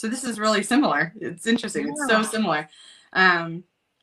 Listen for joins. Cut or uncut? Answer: uncut